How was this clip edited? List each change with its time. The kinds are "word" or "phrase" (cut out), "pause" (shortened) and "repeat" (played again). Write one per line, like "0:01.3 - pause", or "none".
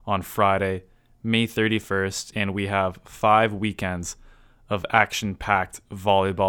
none